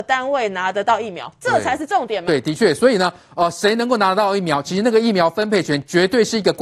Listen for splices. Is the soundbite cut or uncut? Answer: uncut